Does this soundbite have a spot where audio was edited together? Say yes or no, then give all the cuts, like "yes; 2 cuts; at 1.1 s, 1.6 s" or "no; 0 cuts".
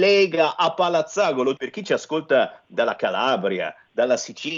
yes; 1 cut; at 1.6 s